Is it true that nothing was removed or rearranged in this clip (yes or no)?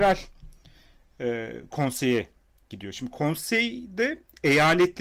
yes